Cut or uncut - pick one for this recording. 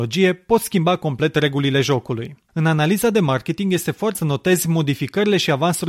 cut